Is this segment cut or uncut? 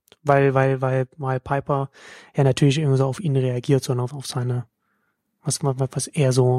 uncut